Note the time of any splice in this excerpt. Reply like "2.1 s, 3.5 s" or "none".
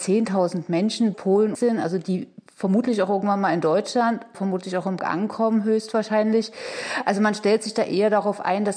1.1 s, 1.5 s, 4.3 s, 5.0 s